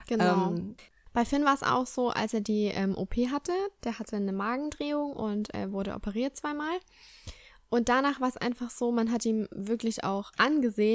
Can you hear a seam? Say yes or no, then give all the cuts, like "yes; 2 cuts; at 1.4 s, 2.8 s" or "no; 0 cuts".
no; 0 cuts